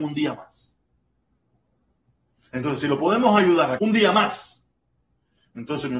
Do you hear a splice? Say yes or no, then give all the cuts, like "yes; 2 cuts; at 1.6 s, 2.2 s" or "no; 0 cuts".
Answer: yes; 1 cut; at 3.8 s